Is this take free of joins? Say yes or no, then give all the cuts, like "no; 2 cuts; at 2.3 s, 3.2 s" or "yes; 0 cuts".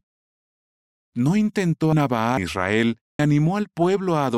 no; 3 cuts; at 1.9 s, 2.4 s, 3.2 s